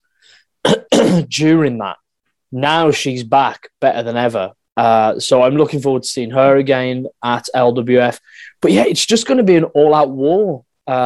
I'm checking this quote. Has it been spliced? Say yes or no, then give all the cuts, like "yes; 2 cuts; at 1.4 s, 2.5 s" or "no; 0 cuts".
no; 0 cuts